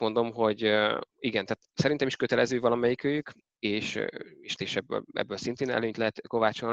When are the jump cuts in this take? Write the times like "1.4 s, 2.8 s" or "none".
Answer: 1.1 s, 4.6 s